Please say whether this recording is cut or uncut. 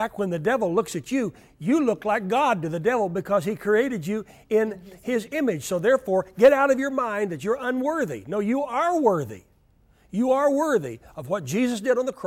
uncut